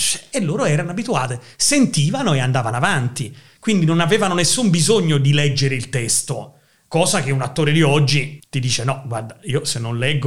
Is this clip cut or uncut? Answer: uncut